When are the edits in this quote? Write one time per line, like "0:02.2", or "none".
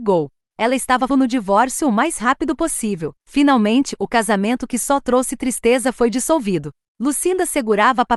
0:01.1
0:03.2